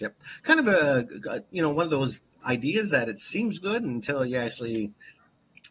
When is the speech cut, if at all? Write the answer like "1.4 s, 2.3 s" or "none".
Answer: none